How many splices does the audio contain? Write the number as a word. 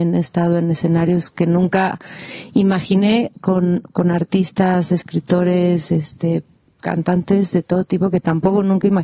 zero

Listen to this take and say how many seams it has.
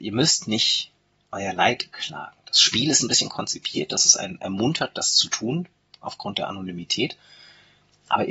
zero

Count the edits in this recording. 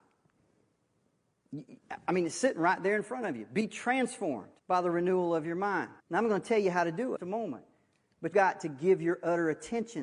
four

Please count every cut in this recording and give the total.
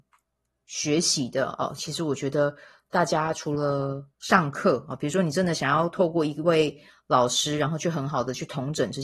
one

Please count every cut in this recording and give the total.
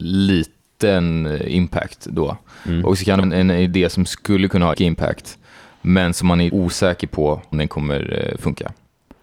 four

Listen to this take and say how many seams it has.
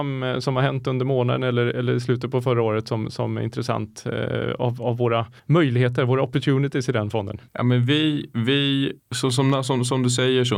three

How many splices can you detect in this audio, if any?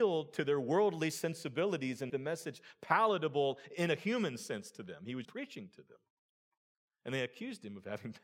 two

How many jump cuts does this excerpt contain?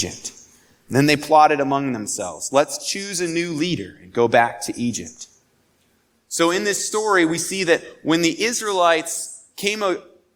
zero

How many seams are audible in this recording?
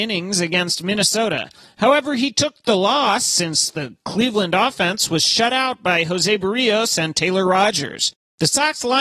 zero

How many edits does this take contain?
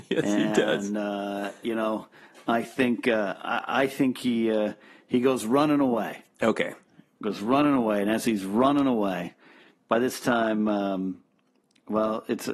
zero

